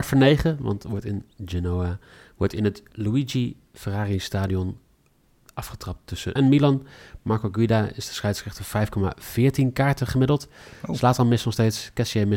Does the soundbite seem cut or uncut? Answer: cut